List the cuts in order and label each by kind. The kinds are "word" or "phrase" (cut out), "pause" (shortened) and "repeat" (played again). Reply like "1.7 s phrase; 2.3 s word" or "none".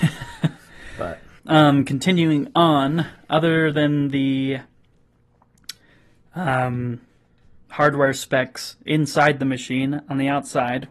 1.4 s pause; 7.6 s pause

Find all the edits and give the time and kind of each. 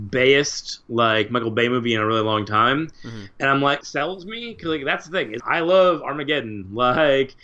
3.8 s phrase; 5.4 s word

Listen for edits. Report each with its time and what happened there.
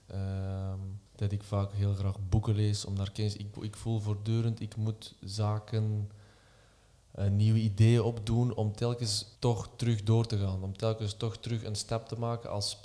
1.1 s pause; 3.5 s word; 9.4 s pause

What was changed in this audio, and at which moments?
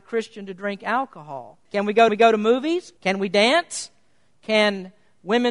1.7 s pause; 2.1 s repeat; 3.0 s pause

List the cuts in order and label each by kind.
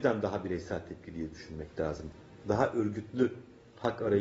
none

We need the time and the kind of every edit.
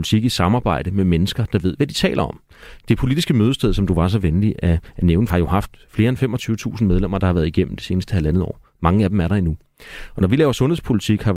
5.3 s phrase

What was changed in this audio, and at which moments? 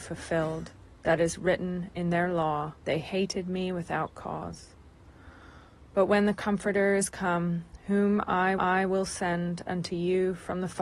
2.8 s pause; 8.6 s repeat

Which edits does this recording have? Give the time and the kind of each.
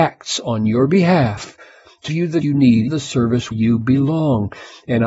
2.1 s word; 2.4 s word; 2.9 s word; 3.5 s word

